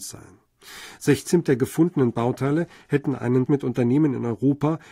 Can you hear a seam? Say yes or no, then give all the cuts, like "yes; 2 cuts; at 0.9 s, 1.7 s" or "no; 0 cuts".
yes; 2 cuts; at 1.4 s, 3.5 s